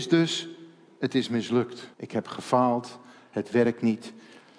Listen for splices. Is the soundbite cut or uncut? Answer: cut